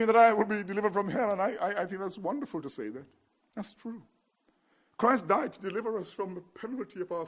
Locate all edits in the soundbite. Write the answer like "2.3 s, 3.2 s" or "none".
none